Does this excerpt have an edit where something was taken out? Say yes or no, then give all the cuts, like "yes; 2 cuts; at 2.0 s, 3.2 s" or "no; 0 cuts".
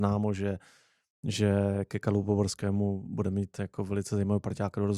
no; 0 cuts